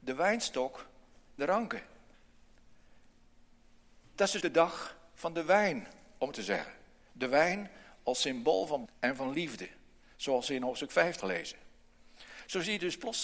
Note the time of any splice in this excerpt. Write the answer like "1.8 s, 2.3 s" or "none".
1.4 s, 4.4 s, 6.3 s, 8.9 s, 11.2 s

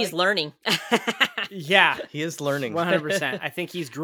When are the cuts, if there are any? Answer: none

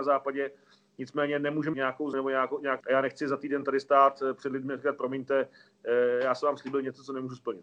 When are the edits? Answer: 1.7 s, 2.1 s, 2.8 s

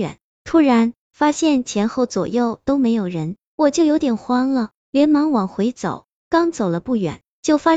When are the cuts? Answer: 1.0 s

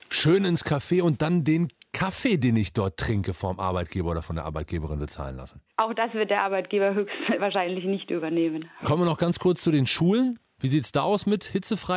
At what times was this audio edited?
5.7 s

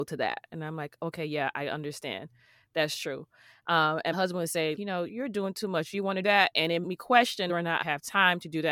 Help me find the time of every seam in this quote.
4.1 s, 4.8 s, 5.1 s, 5.9 s, 6.2 s, 6.8 s, 7.5 s, 7.8 s

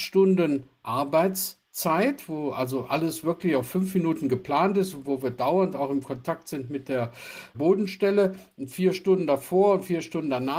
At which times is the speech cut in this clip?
none

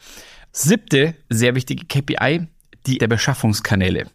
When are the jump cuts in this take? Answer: 1.3 s, 3.0 s

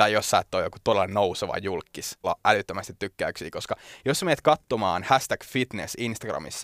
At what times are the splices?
2.2 s

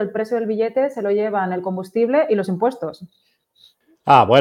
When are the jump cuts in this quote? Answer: none

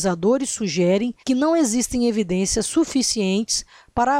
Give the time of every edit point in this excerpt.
1.2 s

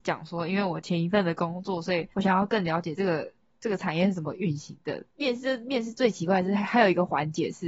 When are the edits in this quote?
2.1 s

